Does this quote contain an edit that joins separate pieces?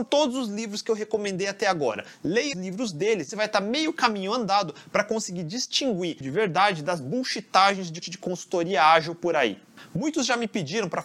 yes; 4 cuts; at 2.5 s, 3.3 s, 6.2 s, 8.0 s

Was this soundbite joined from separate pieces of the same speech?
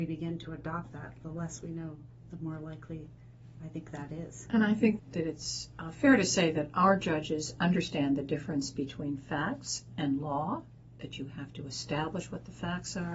yes; 1 cut; at 5.0 s

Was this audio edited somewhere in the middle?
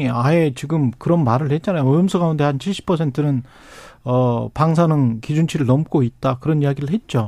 no; 0 cuts

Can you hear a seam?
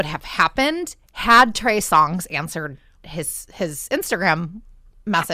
no; 0 cuts

